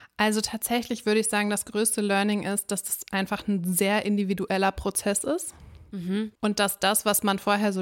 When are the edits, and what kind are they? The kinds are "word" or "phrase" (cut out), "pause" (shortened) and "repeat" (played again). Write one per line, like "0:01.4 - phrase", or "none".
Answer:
none